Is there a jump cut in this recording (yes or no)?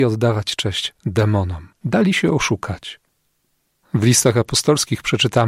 yes